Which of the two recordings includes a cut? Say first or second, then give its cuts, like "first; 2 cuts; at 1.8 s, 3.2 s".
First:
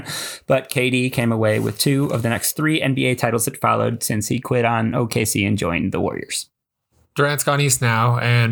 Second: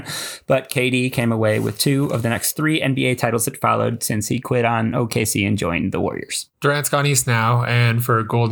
second; 1 cut; at 6.5 s